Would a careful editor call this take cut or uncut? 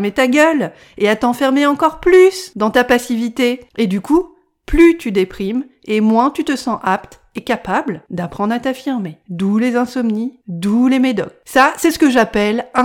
uncut